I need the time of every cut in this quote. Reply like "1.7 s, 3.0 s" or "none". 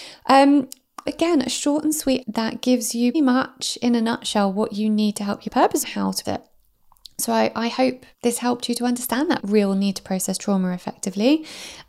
1.1 s, 2.2 s, 3.1 s, 5.5 s, 5.8 s, 6.2 s, 8.1 s, 9.4 s